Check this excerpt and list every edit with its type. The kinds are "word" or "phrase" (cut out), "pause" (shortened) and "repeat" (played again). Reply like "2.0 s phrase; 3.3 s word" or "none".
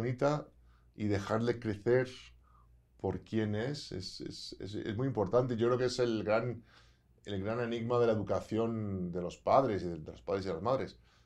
none